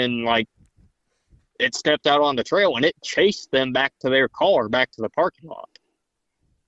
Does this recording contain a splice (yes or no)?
no